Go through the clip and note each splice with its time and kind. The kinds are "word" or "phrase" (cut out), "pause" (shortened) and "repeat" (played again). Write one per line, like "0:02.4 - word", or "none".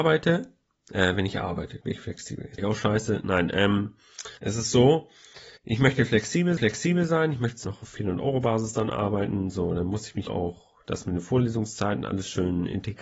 0:01.8 - word
0:02.6 - word
0:04.4 - pause
0:05.6 - pause
0:06.6 - repeat
0:07.6 - word
0:10.3 - word